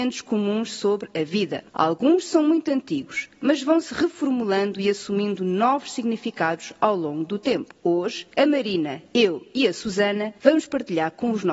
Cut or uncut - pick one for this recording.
cut